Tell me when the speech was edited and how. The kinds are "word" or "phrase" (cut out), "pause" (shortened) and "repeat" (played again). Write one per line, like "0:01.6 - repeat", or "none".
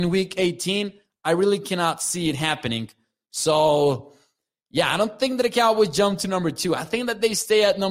none